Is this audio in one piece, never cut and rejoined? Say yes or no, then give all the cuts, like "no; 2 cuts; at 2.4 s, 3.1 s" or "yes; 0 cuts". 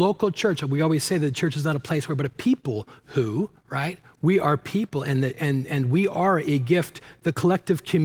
no; 1 cut; at 3.5 s